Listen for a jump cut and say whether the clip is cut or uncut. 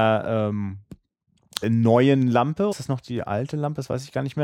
cut